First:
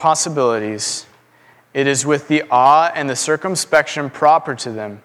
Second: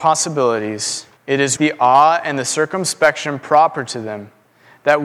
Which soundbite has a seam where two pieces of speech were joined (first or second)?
second